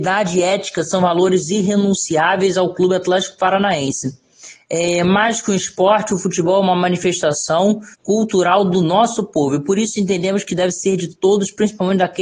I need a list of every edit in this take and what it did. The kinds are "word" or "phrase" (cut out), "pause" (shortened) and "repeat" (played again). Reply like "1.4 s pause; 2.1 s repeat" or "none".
7.9 s pause